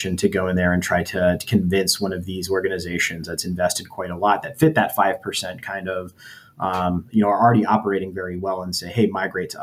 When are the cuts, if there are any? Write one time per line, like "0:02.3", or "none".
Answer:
none